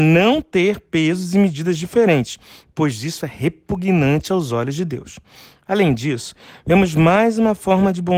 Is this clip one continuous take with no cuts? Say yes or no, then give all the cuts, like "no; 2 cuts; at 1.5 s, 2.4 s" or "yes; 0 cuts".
yes; 0 cuts